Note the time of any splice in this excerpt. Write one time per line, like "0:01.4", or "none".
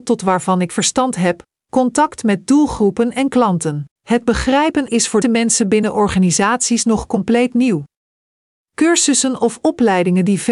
0:03.9
0:04.9
0:05.2